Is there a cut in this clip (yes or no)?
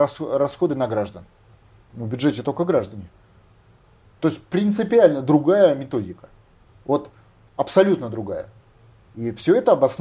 no